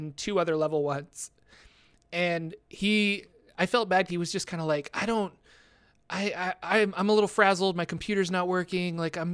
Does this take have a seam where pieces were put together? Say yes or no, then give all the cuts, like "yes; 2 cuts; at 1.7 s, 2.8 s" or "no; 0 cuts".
yes; 1 cut; at 4.1 s